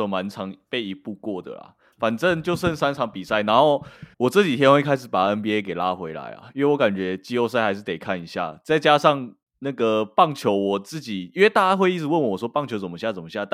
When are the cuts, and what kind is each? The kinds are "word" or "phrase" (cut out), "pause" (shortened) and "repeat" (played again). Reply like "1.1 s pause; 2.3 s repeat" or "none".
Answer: 4.1 s pause